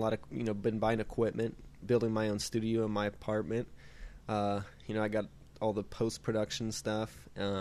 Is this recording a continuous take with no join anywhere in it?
no; 1 cut; at 1.8 s

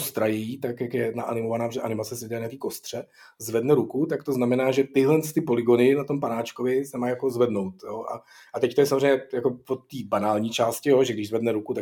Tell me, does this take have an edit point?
no; 0 cuts

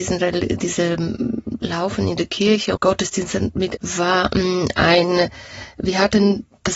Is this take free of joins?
no; 2 cuts; at 2.8 s, 3.8 s

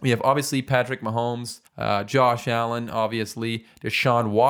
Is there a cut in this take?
yes; 1 cut; at 1.7 s

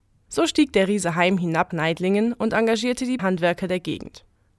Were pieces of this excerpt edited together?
yes; 2 cuts; at 1.7 s, 3.2 s

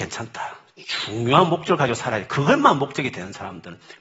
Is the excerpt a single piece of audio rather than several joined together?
yes; 0 cuts

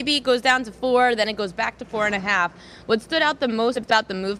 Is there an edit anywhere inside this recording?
no; 0 cuts

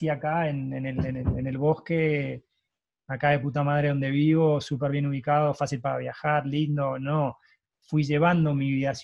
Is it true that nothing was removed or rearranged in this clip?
yes; 0 cuts

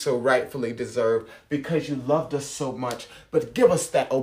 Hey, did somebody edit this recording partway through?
no; 0 cuts

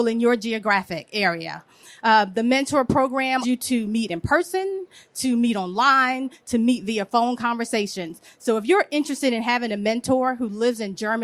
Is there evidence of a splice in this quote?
yes; 1 cut; at 3.4 s

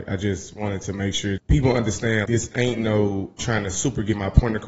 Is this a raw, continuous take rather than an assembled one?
no; 3 cuts; at 1.4 s, 2.3 s, 3.4 s

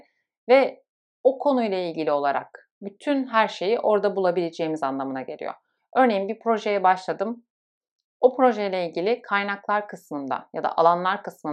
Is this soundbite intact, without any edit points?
yes; 0 cuts

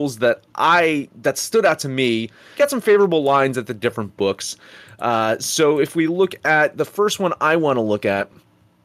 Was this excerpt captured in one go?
no; 1 cut; at 2.6 s

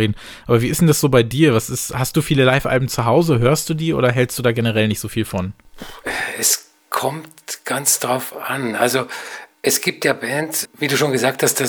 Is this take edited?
yes; 1 cut; at 10.6 s

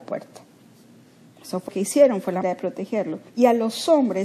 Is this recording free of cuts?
no; 3 cuts; at 1.7 s, 2.4 s, 3.3 s

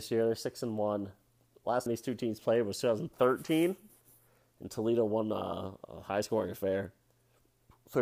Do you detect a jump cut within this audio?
yes; 1 cut; at 1.9 s

